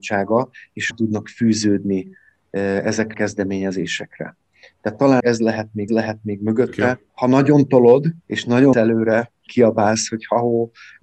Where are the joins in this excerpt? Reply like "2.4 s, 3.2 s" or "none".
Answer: 0.9 s, 3.1 s, 5.2 s, 5.9 s, 7.1 s, 8.2 s, 8.7 s, 9.5 s